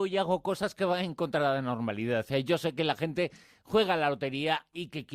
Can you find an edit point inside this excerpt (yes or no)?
no